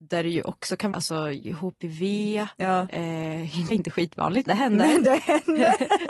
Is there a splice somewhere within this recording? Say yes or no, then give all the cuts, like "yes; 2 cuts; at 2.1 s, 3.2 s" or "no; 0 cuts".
yes; 3 cuts; at 0.9 s, 3.7 s, 4.5 s